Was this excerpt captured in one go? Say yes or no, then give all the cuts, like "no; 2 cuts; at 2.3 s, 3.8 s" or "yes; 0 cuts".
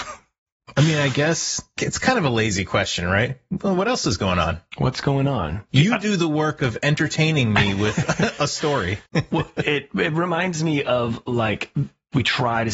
no; 1 cut; at 9.1 s